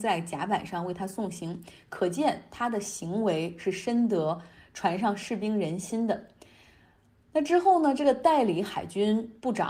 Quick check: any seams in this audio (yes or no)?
no